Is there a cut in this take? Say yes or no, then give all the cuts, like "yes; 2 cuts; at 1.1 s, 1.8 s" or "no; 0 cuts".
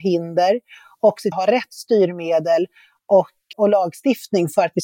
yes; 2 cuts; at 1.3 s, 3.5 s